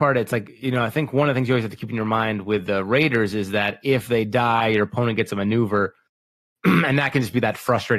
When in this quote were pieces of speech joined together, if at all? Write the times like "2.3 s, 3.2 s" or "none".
none